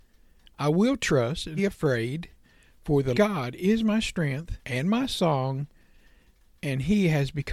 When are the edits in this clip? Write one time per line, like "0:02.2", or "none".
0:01.6
0:03.1
0:04.6